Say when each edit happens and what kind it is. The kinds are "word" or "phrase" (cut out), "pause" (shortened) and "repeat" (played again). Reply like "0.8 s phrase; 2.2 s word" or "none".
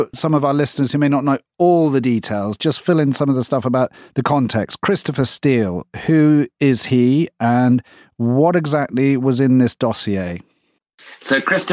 none